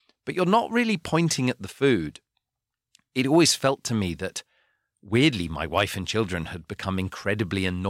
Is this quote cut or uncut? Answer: uncut